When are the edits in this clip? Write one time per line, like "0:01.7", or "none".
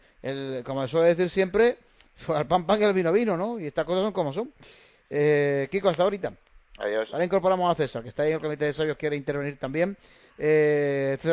none